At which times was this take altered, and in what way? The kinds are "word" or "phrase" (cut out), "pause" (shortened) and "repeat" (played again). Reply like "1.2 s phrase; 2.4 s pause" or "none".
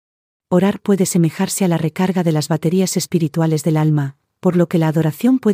none